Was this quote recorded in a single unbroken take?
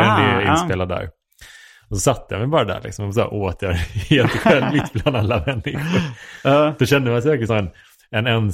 no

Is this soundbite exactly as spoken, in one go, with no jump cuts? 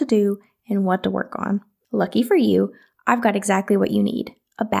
no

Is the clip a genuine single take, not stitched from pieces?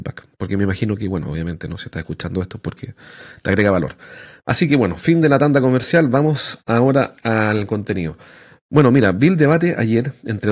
no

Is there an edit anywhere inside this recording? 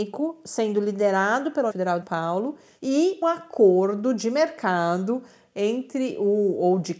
yes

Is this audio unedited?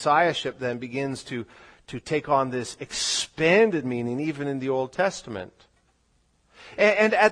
yes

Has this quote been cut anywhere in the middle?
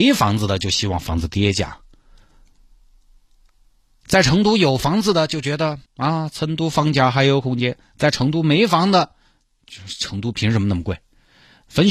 yes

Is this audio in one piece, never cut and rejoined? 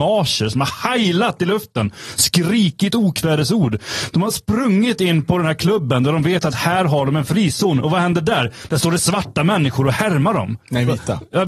yes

